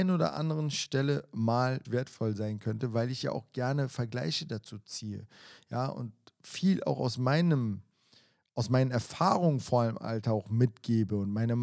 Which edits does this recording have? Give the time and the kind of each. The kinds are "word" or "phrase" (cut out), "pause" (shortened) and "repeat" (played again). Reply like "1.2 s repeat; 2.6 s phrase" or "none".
1.8 s word